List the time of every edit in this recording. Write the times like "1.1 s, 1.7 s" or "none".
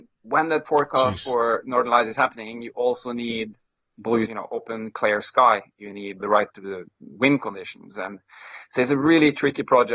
4.3 s, 6.2 s

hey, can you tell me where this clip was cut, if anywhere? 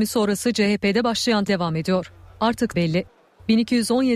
1.5 s, 2.7 s

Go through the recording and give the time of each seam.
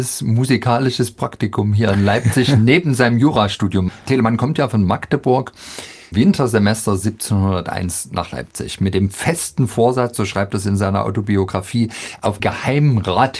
6.1 s, 12.4 s

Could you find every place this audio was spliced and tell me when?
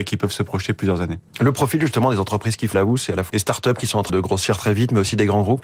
2.7 s, 3.3 s, 4.1 s

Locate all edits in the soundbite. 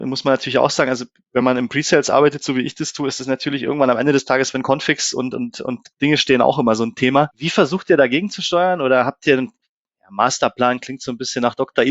none

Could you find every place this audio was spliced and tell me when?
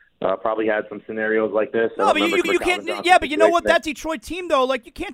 2.4 s

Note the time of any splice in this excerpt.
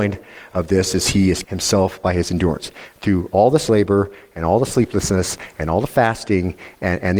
1.4 s

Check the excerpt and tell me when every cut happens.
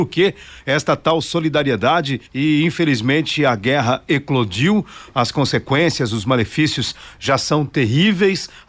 2.3 s

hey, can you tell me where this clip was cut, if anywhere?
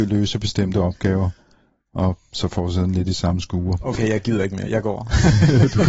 none

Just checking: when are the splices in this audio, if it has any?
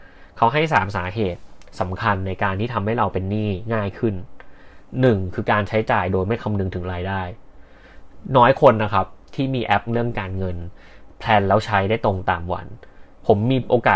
9.9 s

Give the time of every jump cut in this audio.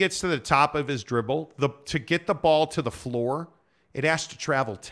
none

